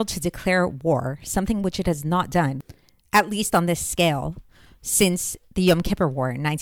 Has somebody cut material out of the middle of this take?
no; 0 cuts

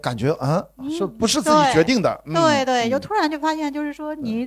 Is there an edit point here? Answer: no; 0 cuts

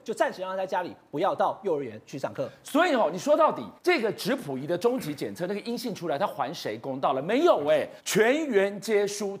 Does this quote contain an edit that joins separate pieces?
yes; 2 cuts; at 3.8 s, 8.0 s

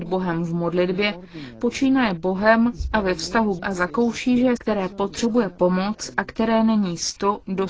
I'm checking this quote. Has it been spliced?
yes; 2 cuts; at 3.6 s, 4.6 s

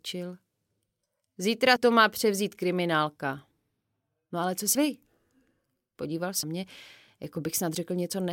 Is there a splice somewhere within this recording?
yes; 3 cuts; at 1.8 s, 4.7 s, 6.4 s

